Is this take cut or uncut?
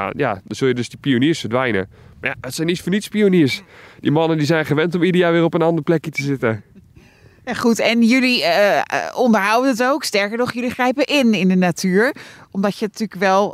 uncut